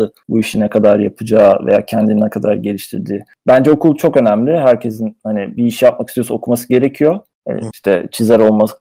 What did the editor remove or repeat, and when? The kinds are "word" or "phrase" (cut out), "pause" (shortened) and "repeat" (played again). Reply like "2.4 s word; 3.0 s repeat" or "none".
5.6 s word; 7.7 s word